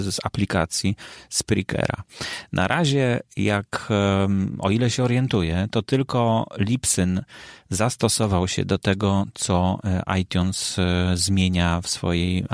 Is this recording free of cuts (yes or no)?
yes